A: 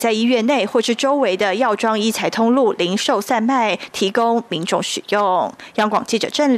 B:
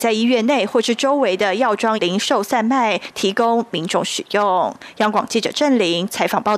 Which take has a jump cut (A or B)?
B